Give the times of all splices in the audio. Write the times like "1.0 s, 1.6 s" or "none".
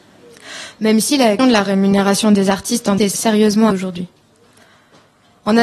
1.4 s, 3.0 s, 3.7 s